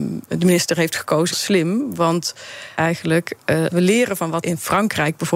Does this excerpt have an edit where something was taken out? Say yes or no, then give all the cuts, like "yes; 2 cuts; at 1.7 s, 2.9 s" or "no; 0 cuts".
yes; 4 cuts; at 1.3 s, 2.8 s, 3.7 s, 4.4 s